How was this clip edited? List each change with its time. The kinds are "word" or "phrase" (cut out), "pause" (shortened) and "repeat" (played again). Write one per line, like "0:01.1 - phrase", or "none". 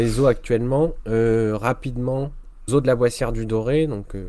0:02.7 - word